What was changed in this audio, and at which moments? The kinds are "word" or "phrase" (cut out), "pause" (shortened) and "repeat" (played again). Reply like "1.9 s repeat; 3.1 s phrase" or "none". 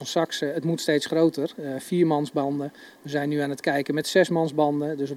none